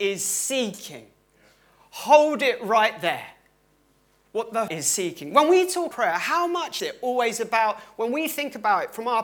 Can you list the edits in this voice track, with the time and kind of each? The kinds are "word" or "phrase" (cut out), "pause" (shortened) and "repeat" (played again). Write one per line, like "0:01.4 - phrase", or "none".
0:04.7 - word
0:05.9 - word
0:06.8 - word